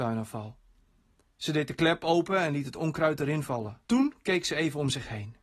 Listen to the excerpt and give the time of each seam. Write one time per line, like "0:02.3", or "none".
0:03.8